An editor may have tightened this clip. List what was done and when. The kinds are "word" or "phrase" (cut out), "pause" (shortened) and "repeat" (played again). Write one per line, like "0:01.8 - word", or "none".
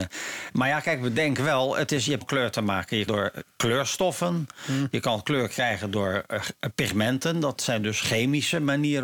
0:02.2 - phrase
0:03.1 - phrase